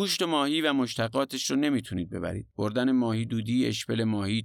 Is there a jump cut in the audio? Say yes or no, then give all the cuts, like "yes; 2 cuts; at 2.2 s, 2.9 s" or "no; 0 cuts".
yes; 1 cut; at 2.5 s